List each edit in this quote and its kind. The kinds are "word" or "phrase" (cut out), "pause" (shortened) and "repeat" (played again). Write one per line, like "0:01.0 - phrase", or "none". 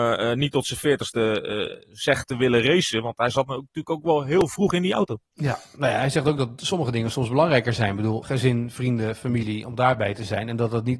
0:01.8 - word
0:08.2 - word